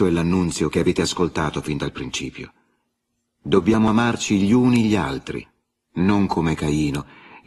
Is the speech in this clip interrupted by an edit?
no; 0 cuts

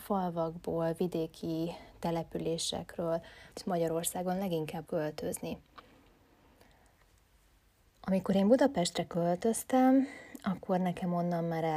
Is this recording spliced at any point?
yes; 2 cuts; at 3.5 s, 4.8 s

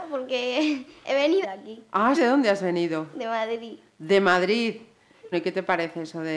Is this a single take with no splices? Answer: no; 3 cuts; at 1.4 s, 2.1 s, 5.3 s

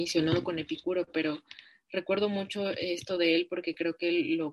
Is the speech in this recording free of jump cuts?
yes; 0 cuts

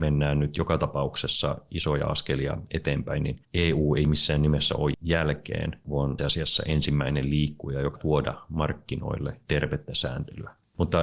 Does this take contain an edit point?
yes; 3 cuts; at 4.9 s, 6.2 s, 8.0 s

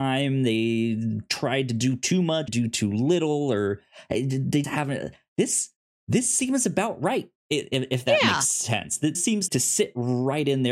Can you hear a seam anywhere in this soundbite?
yes; 6 cuts; at 2.5 s, 4.6 s, 5.9 s, 7.4 s, 9.1 s, 9.5 s

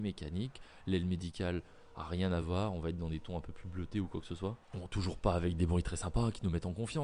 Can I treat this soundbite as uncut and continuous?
yes; 0 cuts

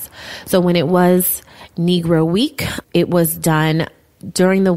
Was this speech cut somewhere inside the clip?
yes; 1 cut; at 2.8 s

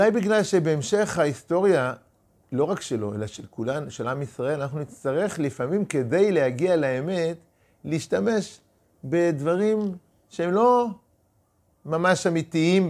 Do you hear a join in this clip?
no; 0 cuts

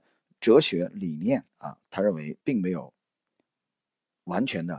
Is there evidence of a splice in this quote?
yes; 2 cuts; at 1.5 s, 2.4 s

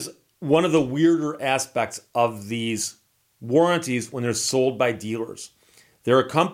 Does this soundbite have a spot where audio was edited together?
no; 0 cuts

